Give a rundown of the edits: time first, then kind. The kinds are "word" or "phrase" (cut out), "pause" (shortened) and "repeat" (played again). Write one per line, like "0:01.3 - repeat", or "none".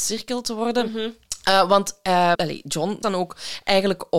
0:02.3 - word
0:03.0 - word